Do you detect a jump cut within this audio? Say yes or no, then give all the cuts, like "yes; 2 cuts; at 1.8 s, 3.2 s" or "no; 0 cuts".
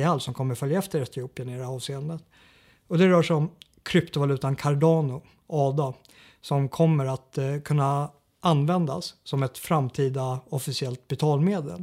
no; 0 cuts